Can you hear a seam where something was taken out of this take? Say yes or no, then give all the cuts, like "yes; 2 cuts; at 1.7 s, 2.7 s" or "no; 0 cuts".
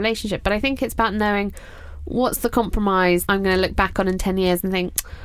yes; 1 cut; at 3.3 s